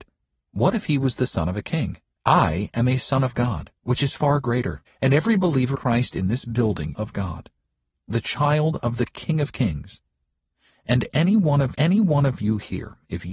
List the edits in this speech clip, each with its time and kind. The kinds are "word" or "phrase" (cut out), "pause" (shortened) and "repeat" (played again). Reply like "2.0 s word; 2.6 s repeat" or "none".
2.1 s pause; 3.8 s pause; 4.9 s pause; 5.7 s phrase; 6.9 s phrase; 11.7 s repeat